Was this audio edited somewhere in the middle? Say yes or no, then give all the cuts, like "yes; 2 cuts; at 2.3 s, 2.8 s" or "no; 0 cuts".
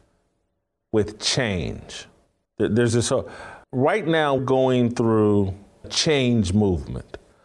yes; 4 cuts; at 2.5 s, 3.6 s, 4.4 s, 5.8 s